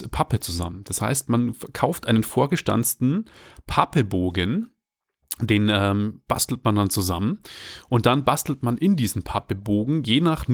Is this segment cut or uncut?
uncut